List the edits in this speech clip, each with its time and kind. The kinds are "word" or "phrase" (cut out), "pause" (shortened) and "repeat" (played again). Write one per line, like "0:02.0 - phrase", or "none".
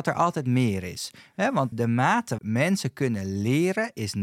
0:01.7 - word
0:02.4 - word